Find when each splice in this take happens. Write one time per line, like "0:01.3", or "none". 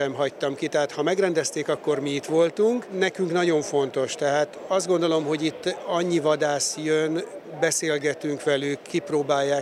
none

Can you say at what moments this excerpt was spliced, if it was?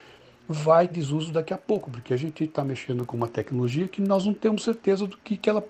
0:00.9

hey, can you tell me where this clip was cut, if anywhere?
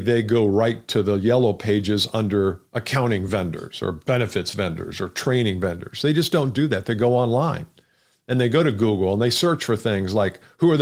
none

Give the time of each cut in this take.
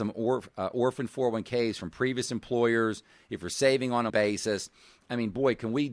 0:04.1

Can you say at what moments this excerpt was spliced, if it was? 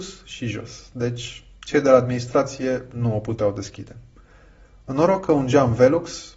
none

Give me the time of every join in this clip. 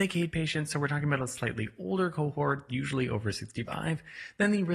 0:02.7

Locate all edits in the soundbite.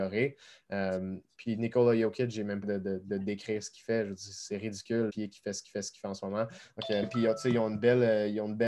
0:02.6
0:05.1
0:05.7
0:07.0

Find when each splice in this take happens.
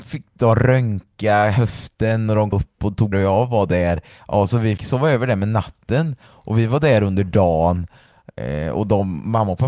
0:02.5
0:03.1
0:04.8

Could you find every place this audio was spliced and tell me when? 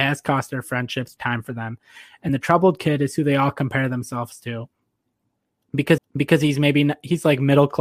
0:01.2
0:02.3
0:06.0

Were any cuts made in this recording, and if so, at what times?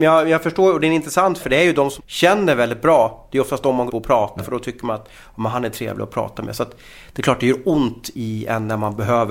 0:01.4
0:02.0
0:03.9
0:04.4
0:08.1

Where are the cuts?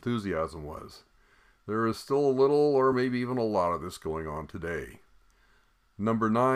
none

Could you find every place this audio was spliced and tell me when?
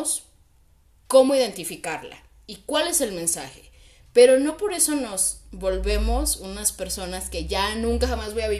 none

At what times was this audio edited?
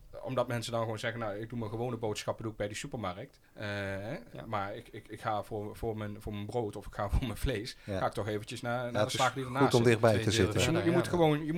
0:03.4

